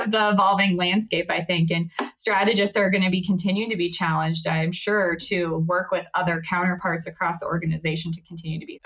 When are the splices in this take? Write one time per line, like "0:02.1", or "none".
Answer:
none